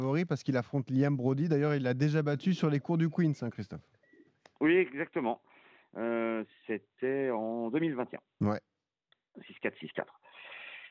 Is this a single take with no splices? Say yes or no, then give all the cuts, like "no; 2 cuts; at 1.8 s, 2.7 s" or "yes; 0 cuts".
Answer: yes; 0 cuts